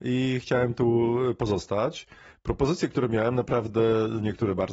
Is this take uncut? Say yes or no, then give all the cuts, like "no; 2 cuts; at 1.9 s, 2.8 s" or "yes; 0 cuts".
yes; 0 cuts